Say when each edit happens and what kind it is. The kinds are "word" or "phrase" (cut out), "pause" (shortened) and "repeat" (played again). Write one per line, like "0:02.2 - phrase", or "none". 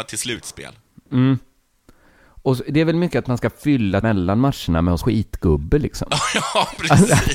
0:04.0 - word
0:05.0 - word